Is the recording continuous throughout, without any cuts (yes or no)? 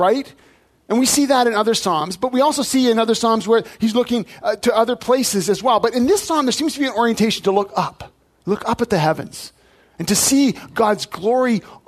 yes